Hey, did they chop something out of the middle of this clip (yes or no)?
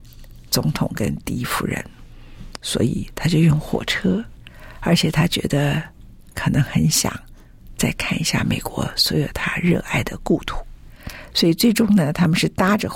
yes